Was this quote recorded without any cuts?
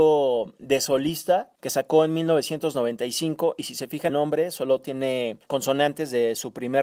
no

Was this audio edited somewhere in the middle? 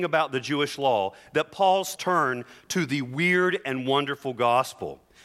yes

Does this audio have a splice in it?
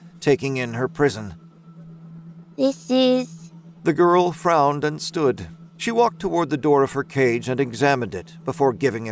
yes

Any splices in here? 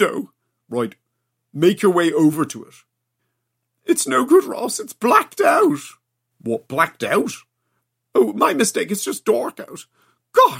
no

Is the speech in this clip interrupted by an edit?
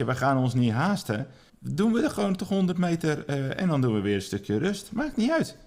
yes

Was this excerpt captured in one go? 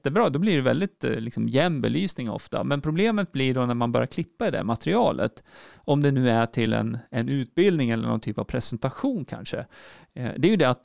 yes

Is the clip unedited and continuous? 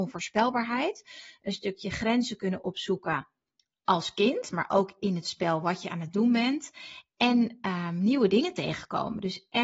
yes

